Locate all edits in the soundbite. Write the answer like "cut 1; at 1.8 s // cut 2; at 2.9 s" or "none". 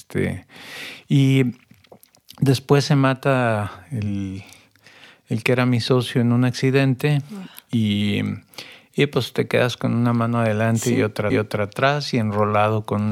cut 1; at 11.3 s